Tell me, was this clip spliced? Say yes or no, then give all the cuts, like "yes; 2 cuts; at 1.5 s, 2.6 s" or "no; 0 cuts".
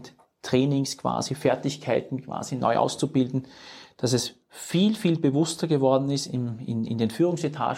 no; 0 cuts